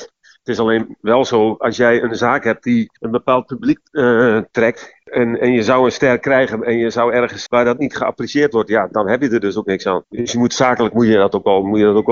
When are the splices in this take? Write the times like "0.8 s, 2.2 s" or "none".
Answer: 3.0 s, 7.5 s

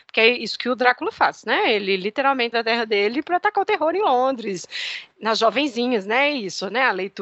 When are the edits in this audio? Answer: 2.5 s

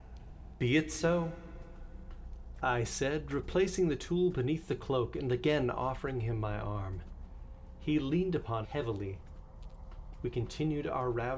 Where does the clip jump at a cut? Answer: 8.6 s

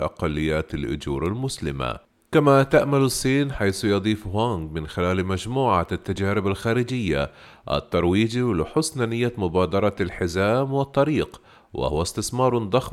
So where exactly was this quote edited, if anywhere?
none

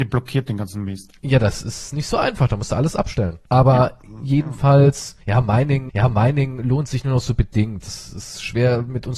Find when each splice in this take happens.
3.5 s, 5.9 s

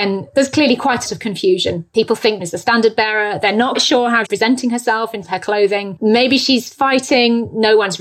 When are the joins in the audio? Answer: 1.0 s, 2.4 s, 3.7 s, 4.2 s, 5.2 s

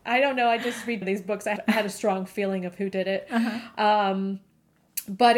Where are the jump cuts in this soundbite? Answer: 1.0 s, 1.6 s

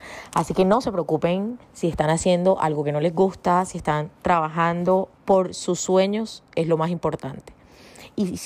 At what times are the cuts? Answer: 1.6 s, 5.1 s

